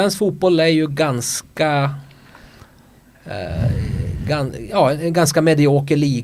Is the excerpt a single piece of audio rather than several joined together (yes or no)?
yes